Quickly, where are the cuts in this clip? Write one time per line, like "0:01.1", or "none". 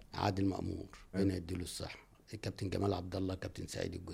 0:01.1

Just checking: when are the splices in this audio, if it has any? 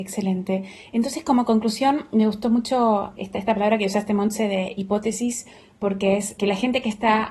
0:03.2
0:06.4

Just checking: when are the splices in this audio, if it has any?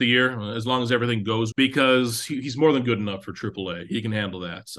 0:01.5

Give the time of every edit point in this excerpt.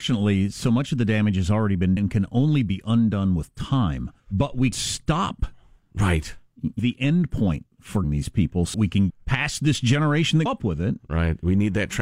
0:02.0
0:04.2
0:04.7
0:06.8
0:08.0
0:08.7
0:09.1
0:10.5

